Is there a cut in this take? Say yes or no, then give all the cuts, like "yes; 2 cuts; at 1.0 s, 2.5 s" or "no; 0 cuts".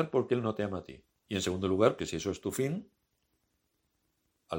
yes; 2 cuts; at 1.1 s, 2.0 s